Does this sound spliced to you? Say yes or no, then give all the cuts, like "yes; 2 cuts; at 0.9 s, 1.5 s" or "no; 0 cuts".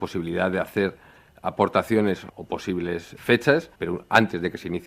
yes; 3 cuts; at 2.3 s, 3.2 s, 3.7 s